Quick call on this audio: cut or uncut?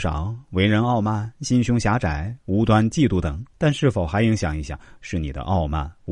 cut